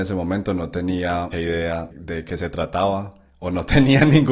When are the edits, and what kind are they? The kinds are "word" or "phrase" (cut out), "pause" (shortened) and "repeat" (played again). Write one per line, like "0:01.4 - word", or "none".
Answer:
0:01.3 - word
0:01.9 - word